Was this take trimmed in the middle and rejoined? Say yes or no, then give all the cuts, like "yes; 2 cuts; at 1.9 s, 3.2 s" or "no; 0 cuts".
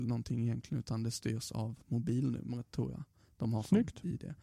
no; 0 cuts